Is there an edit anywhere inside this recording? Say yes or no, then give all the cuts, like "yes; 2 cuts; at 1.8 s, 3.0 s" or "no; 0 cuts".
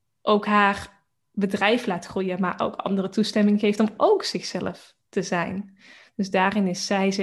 no; 0 cuts